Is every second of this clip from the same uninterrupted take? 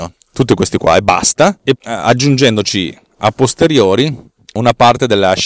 no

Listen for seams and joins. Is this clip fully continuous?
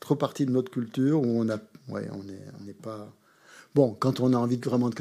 yes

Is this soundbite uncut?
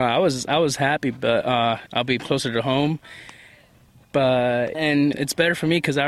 no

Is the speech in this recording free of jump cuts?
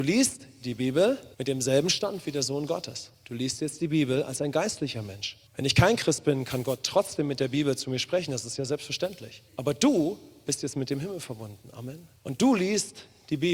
no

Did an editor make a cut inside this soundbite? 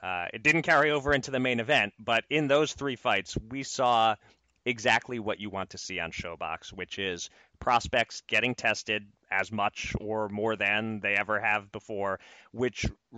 no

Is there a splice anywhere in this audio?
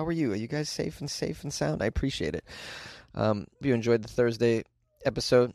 yes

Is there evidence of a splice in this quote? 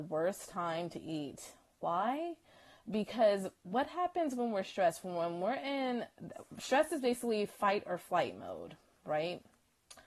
yes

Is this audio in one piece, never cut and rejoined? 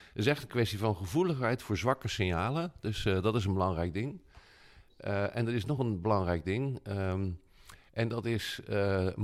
yes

